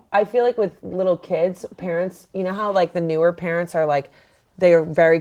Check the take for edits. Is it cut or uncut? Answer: uncut